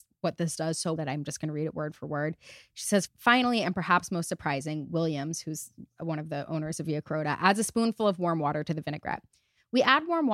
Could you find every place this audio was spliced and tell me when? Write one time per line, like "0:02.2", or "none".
0:01.0

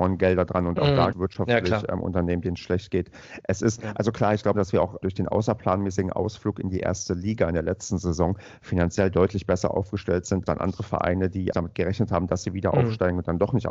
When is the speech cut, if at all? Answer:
0:01.1
0:04.5
0:05.0
0:10.5
0:11.5

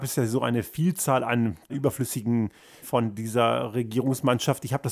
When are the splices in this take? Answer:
0:01.7
0:02.8

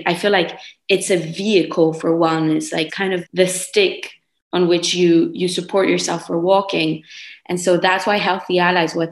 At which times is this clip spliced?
0:02.9
0:03.2

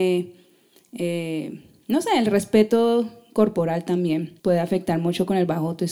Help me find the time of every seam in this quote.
0:04.4

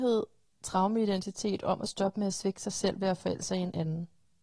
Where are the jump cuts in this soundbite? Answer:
none

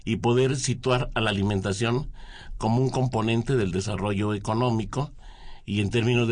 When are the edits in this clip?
none

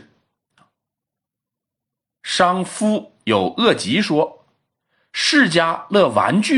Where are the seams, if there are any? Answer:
none

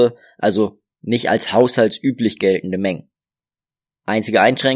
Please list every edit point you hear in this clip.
none

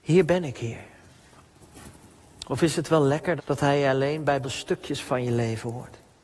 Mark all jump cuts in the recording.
0:03.4
0:04.4

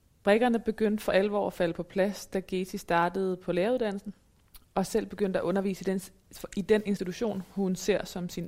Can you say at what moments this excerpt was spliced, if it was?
none

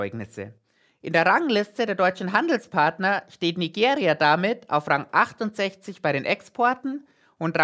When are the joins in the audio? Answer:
none

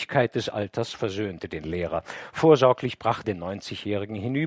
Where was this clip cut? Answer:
0:03.2

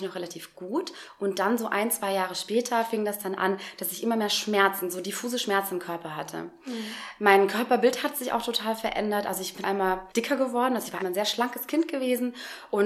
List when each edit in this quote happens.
0:09.6
0:10.1
0:11.0

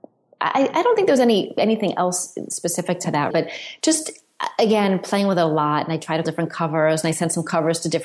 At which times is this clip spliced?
0:03.3
0:06.2

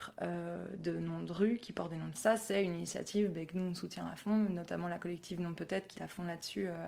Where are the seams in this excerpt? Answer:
0:02.1
0:05.9

